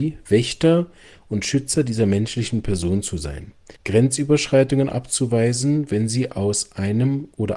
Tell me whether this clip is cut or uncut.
cut